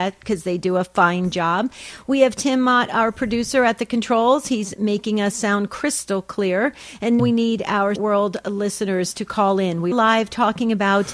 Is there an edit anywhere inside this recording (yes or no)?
yes